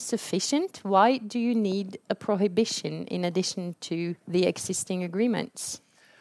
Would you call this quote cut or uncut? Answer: cut